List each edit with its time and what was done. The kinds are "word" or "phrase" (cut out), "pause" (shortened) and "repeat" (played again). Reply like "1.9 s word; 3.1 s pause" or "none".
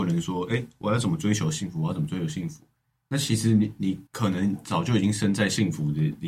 4.1 s pause

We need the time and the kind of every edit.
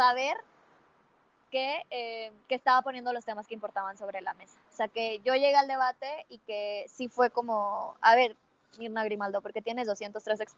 none

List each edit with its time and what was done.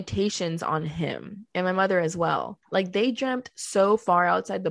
1.5 s pause; 2.6 s pause

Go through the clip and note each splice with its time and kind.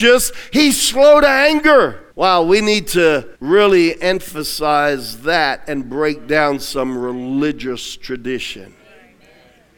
2.1 s pause; 3.3 s pause

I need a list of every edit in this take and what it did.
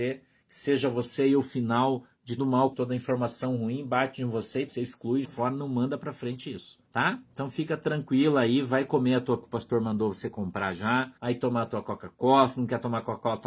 2.4 s word; 2.7 s word; 4.7 s word; 5.2 s word; 6.9 s pause; 9.4 s word; 11.2 s pause

